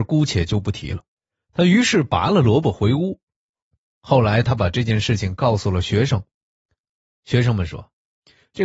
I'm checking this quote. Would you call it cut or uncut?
cut